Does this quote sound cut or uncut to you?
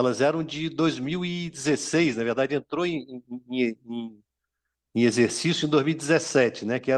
uncut